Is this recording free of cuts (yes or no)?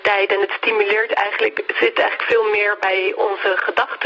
yes